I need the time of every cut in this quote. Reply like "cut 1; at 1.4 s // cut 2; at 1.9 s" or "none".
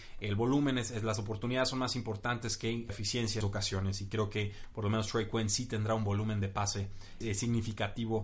cut 1; at 2.9 s // cut 2; at 3.4 s // cut 3; at 7.2 s